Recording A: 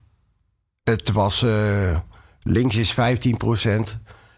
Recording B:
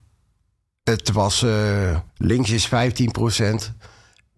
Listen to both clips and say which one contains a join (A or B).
B